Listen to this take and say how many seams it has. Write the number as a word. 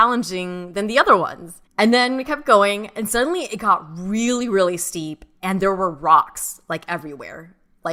one